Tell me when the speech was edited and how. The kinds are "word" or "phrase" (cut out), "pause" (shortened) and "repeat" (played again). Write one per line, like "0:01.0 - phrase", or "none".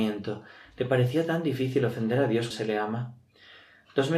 0:02.5 - word

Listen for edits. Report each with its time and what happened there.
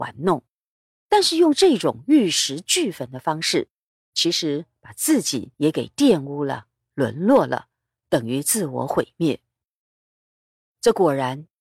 0:05.5 - pause

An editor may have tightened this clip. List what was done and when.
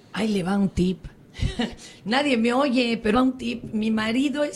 0:03.1 - phrase

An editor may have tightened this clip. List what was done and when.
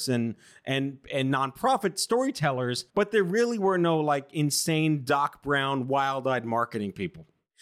0:02.9 - pause

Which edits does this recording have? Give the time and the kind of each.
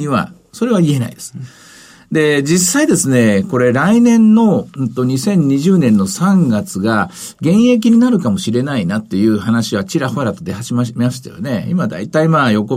none

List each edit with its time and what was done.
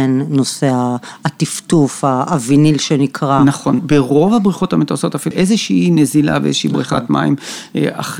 0:03.8 - word
0:05.3 - phrase

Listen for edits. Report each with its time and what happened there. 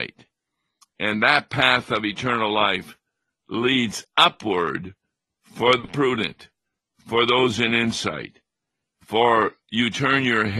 none

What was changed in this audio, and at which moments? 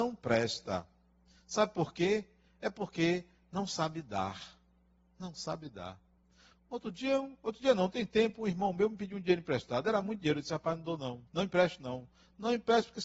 0:11.3 - pause

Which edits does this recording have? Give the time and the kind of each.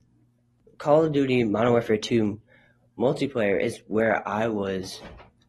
none

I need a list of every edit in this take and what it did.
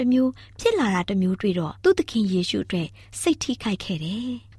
0:01.8 - pause

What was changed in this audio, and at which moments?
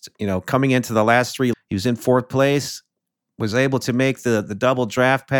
0:01.5 - word

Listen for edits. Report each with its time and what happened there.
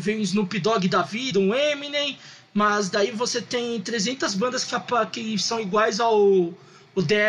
none

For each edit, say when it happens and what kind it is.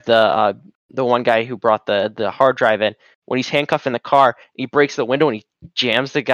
none

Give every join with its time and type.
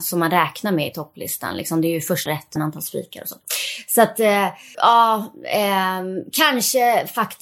0:02.3 - word
0:02.6 - word
0:04.7 - word

